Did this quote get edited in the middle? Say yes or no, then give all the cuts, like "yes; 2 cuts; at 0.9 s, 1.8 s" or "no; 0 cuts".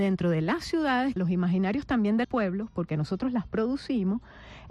yes; 2 cuts; at 1.2 s, 2.2 s